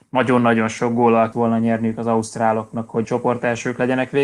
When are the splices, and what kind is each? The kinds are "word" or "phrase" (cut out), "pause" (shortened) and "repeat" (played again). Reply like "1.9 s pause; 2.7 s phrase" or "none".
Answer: 1.3 s word; 3.0 s word